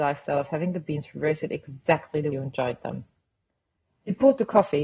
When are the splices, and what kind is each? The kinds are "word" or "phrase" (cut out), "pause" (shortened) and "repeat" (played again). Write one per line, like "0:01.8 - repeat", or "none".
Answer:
0:02.3 - word

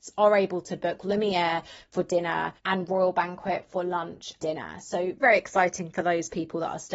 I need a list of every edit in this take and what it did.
0:02.6 - pause
0:04.4 - word
0:05.2 - word

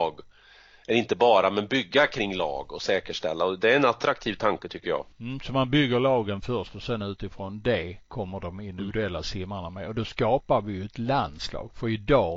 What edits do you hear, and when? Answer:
0:05.1 - pause

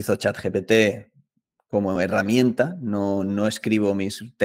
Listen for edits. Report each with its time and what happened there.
none

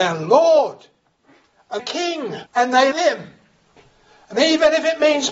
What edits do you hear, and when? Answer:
0:01.8 - word
0:02.5 - pause
0:02.9 - word

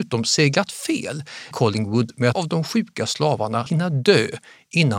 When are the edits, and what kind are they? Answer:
0:01.5 - word
0:02.3 - word
0:03.7 - word

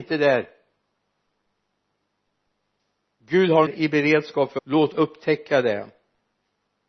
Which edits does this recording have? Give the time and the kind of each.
0:03.7 - phrase
0:04.6 - word
0:04.9 - word

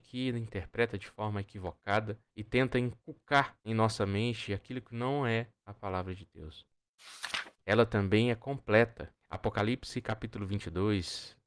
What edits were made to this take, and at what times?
0:02.3 - pause
0:07.6 - pause

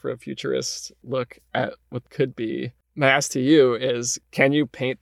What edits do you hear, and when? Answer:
0:02.1 - word

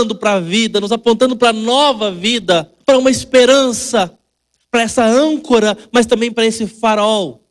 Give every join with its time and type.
0:02.8 - pause

